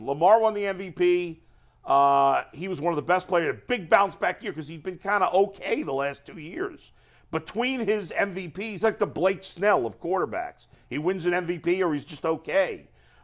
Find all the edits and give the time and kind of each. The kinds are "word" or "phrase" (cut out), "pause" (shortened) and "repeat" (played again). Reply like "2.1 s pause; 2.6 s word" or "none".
8.8 s phrase